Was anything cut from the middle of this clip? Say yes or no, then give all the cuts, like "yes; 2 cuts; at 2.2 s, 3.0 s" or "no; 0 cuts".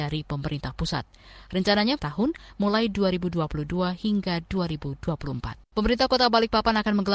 yes; 2 cuts; at 2.0 s, 5.6 s